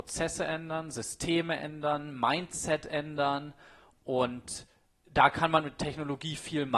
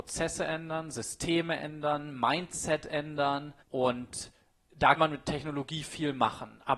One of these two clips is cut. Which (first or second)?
second